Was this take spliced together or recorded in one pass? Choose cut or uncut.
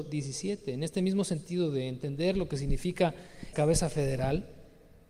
cut